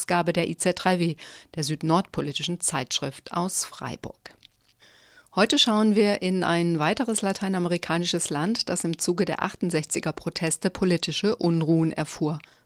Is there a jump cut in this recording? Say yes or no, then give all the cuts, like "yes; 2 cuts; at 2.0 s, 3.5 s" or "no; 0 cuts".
no; 0 cuts